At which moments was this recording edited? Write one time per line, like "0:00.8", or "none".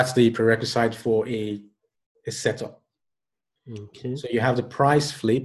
none